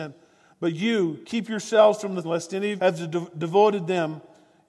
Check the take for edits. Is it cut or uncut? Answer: cut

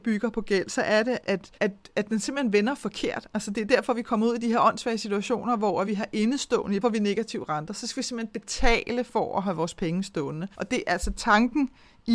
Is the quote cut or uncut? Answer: cut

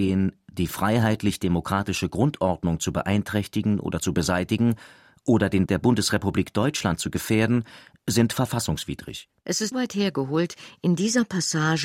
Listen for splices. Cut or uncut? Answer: cut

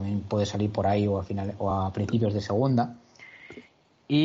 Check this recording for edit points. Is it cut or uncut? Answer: uncut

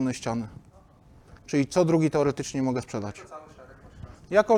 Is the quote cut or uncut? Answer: cut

